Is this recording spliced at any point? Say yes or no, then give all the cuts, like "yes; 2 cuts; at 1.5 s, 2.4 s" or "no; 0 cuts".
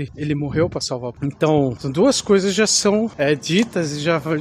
no; 0 cuts